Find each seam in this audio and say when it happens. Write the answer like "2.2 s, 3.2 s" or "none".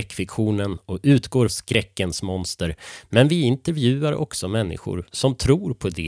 1.5 s